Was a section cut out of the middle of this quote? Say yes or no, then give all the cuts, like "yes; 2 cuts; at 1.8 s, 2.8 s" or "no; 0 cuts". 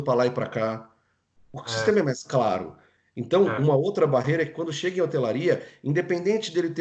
no; 0 cuts